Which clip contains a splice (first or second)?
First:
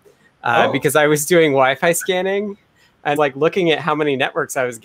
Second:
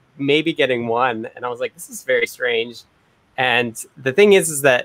first